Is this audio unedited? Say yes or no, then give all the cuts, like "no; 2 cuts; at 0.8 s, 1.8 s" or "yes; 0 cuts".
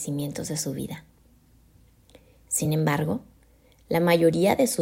yes; 0 cuts